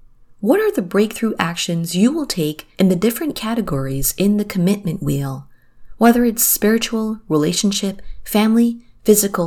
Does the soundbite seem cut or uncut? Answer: cut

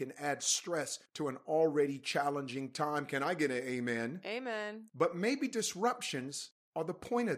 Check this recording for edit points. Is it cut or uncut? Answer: uncut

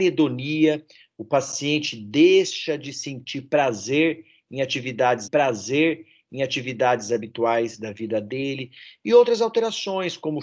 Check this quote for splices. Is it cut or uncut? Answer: cut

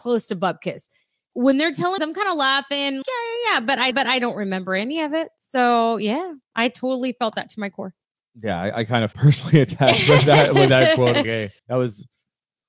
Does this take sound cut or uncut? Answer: cut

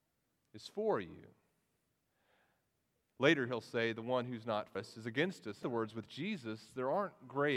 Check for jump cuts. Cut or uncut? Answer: cut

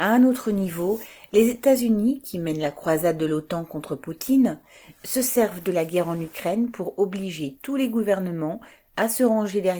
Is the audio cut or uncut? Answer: uncut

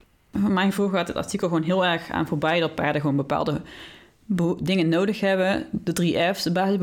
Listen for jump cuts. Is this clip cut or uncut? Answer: uncut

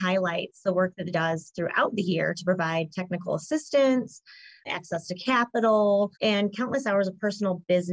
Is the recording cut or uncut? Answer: cut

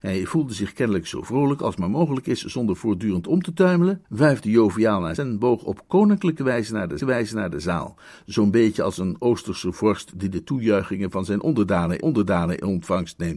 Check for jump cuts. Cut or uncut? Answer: cut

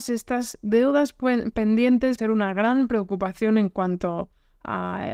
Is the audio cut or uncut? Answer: cut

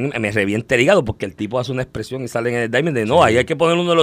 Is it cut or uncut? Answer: uncut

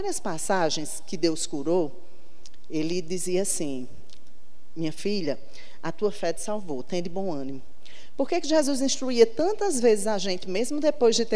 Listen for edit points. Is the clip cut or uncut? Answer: uncut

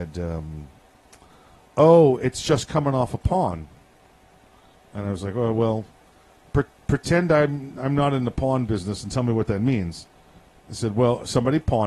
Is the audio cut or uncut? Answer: uncut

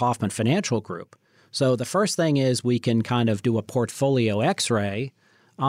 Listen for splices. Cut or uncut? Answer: uncut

